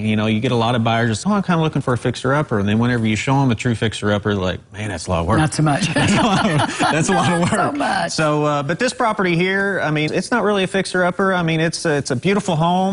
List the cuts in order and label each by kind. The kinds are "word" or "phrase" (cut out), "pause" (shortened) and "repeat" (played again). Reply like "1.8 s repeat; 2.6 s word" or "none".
1.2 s word; 10.1 s word